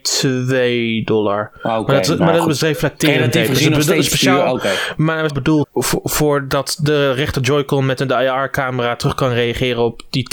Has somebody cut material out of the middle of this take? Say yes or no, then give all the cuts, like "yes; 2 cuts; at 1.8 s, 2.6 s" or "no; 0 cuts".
yes; 2 cuts; at 5.3 s, 5.6 s